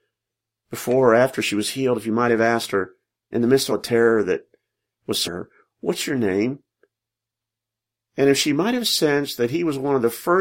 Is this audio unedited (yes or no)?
no